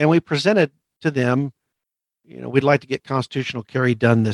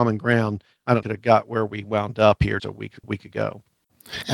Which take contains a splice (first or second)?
second